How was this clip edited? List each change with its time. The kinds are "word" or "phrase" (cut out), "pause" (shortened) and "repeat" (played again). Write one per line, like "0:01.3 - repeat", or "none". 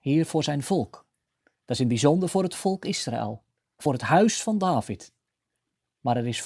none